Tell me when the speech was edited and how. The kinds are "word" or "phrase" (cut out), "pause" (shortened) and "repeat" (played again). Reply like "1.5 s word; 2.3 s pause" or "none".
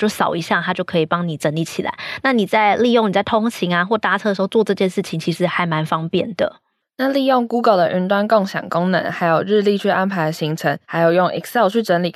10.8 s pause